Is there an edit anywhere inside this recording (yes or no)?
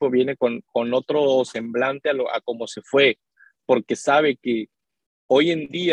no